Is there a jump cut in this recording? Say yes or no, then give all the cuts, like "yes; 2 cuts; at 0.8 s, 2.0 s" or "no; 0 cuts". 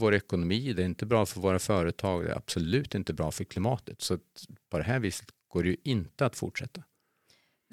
no; 0 cuts